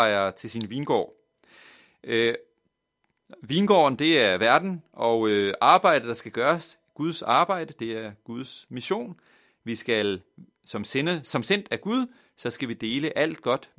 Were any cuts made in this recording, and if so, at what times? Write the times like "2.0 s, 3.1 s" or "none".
none

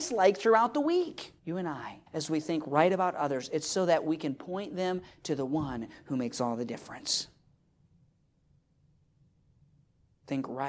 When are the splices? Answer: 1.4 s, 2.1 s

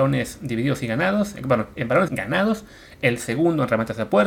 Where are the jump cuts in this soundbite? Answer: 2.1 s

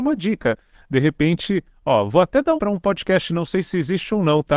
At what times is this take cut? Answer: 2.6 s

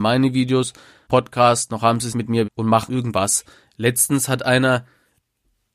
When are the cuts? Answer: 1.1 s, 2.1 s, 2.5 s, 2.9 s

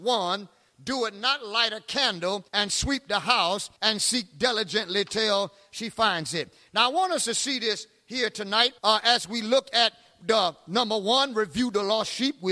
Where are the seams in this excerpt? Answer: 2.5 s, 3.8 s, 8.8 s

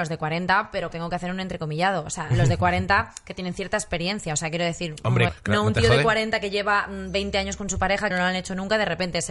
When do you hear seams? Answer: 0.9 s, 5.3 s, 8.1 s

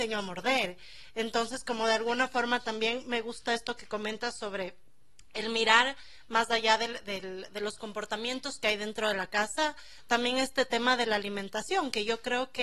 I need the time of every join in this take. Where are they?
none

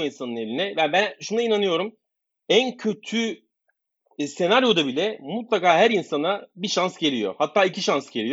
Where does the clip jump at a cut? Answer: none

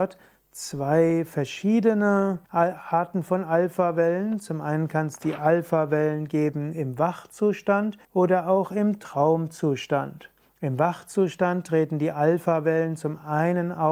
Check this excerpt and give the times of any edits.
2.4 s, 8.0 s, 10.4 s

